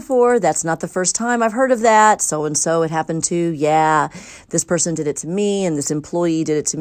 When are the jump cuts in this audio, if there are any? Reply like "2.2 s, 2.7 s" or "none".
none